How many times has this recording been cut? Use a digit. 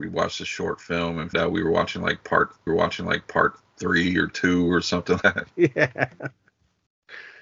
3